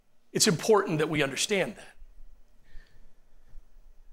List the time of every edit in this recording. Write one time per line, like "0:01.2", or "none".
none

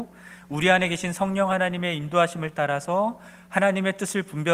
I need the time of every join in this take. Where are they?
none

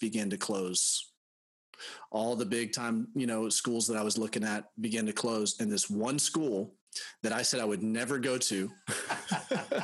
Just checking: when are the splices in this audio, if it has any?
none

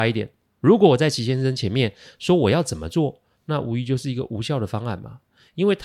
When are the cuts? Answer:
none

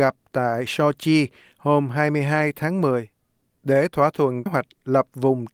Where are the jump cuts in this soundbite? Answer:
0:04.5

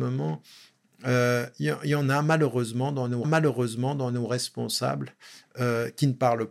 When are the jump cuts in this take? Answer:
0:03.2

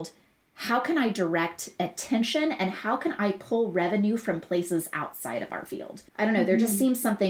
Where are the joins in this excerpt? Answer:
0:06.1

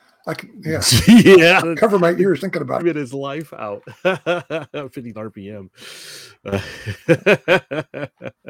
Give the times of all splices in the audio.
0:01.6
0:02.4
0:02.8
0:05.1

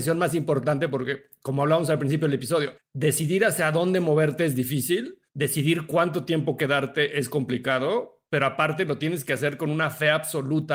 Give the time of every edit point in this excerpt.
0:02.8
0:05.3

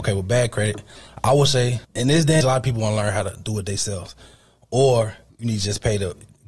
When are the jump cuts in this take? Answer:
0:01.8
0:02.4
0:05.3

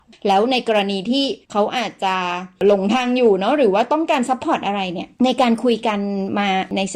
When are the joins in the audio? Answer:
0:01.4
0:05.1

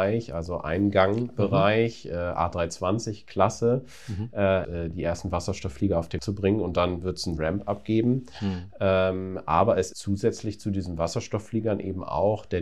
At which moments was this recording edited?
0:04.6
0:06.2
0:09.9

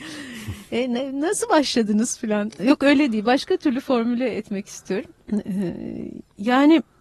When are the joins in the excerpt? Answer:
none

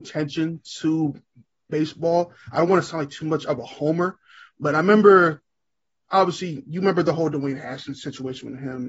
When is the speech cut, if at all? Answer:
none

